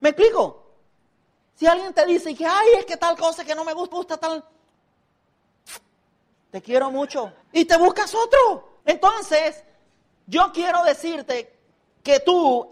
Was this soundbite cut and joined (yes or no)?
yes